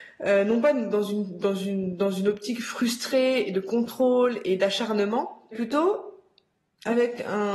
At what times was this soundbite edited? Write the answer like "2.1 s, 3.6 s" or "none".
5.5 s